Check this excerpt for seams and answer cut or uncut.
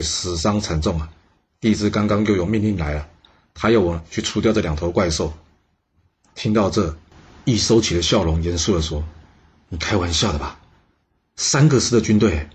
uncut